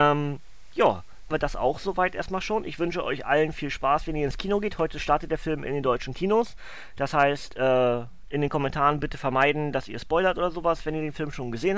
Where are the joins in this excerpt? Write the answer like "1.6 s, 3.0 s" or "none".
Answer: 1.3 s